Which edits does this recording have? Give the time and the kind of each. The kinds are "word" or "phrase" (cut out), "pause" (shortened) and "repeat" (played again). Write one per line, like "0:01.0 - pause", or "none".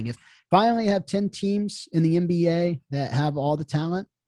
none